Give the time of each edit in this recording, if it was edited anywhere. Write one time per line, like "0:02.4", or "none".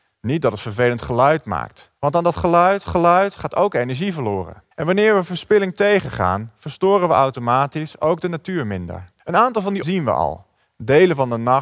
0:02.0
0:02.9
0:04.7
0:09.2
0:09.8